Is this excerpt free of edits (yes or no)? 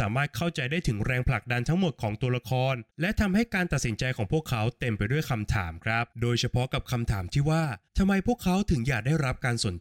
no